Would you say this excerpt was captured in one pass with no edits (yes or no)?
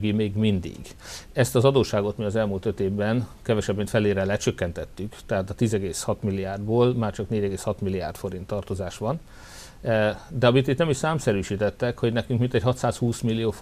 yes